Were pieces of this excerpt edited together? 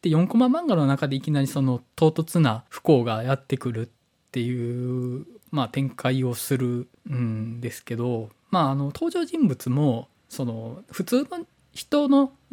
no; 0 cuts

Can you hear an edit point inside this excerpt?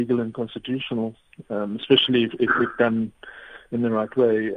no; 0 cuts

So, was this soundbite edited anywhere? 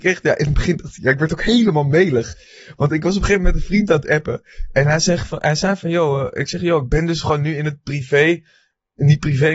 no; 0 cuts

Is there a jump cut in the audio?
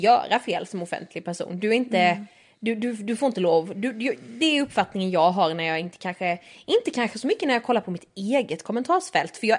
no; 0 cuts

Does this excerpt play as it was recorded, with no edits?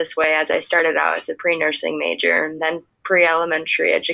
yes; 0 cuts

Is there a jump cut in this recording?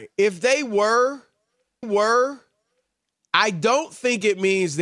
yes; 1 cut; at 1.8 s

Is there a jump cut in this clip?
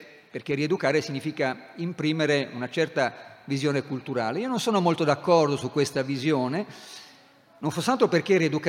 no; 0 cuts

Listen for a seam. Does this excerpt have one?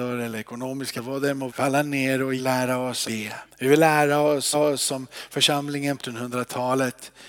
yes; 7 cuts; at 1.0 s, 1.5 s, 2.4 s, 3.0 s, 3.5 s, 4.5 s, 6.0 s

